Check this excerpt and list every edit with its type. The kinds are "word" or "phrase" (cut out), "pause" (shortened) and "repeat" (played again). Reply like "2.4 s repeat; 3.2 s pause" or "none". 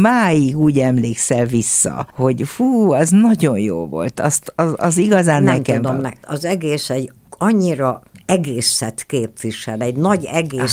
none